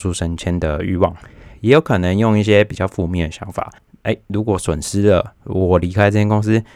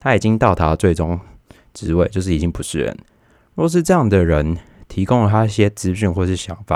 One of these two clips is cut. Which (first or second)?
first